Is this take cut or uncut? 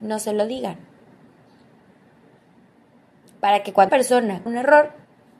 cut